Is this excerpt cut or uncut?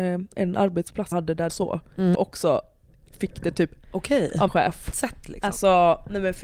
cut